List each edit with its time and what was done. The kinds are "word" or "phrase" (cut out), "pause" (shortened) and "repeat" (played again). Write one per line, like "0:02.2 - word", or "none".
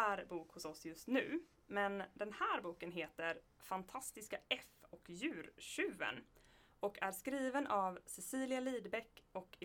none